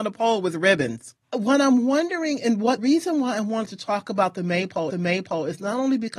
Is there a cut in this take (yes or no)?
yes